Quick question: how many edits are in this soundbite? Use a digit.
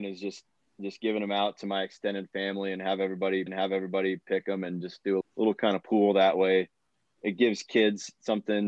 2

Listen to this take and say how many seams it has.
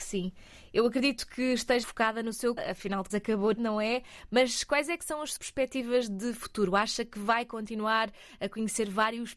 5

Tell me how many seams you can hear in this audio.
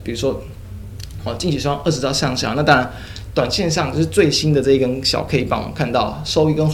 0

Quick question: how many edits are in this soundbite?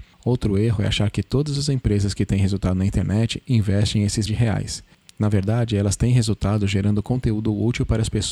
1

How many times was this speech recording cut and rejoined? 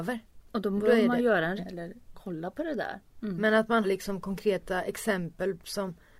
3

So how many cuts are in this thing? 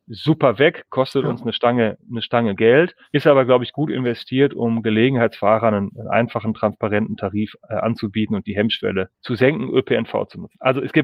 2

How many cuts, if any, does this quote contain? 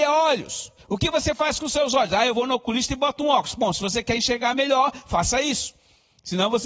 0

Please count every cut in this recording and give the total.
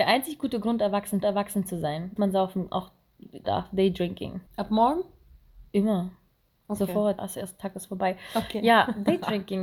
6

